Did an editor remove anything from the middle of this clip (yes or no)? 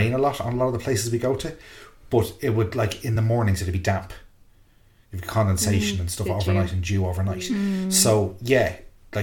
no